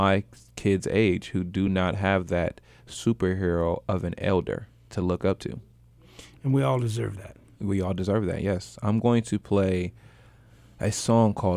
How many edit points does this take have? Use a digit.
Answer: 0